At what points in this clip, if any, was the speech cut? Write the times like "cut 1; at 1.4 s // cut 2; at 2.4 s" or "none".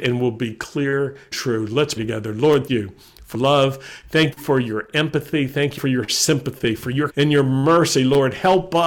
cut 1; at 1.3 s // cut 2; at 2.0 s // cut 3; at 2.7 s // cut 4; at 3.3 s // cut 5; at 4.3 s // cut 6; at 5.8 s // cut 7; at 7.1 s